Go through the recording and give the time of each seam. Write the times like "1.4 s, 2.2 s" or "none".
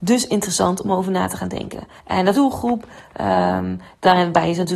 2.0 s, 2.3 s